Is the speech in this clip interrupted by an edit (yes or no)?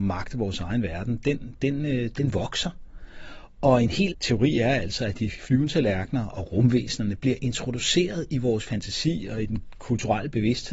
yes